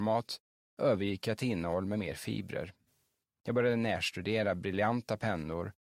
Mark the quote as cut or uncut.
uncut